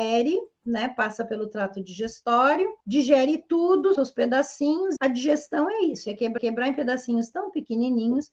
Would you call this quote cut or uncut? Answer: cut